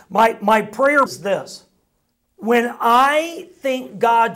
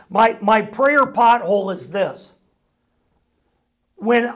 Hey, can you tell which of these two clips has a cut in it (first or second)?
first